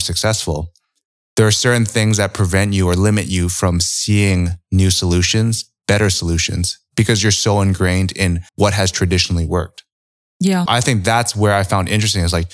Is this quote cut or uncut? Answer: cut